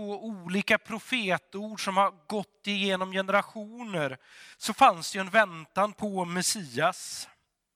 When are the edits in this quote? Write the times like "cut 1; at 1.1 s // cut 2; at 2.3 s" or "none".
cut 1; at 4.5 s